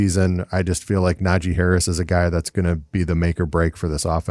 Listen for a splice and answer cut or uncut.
uncut